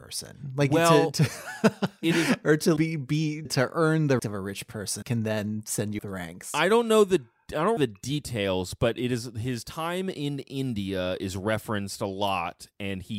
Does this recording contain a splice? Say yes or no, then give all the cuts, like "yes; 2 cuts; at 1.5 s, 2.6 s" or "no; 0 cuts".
yes; 6 cuts; at 2.8 s, 3.5 s, 4.2 s, 5.0 s, 6.0 s, 7.8 s